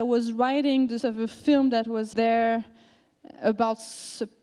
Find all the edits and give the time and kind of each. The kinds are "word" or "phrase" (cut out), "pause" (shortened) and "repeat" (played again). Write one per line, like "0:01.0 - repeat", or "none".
0:01.0 - word
0:02.1 - word